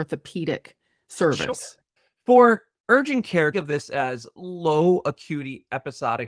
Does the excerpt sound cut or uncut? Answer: cut